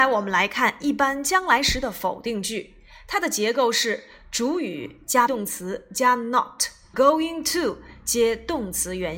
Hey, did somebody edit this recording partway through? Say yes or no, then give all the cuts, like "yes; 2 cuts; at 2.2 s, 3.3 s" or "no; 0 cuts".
yes; 2 cuts; at 5.3 s, 6.9 s